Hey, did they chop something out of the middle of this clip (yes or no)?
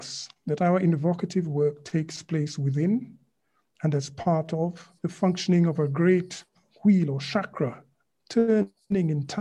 yes